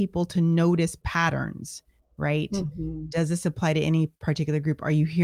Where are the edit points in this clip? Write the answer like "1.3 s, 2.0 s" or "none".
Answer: none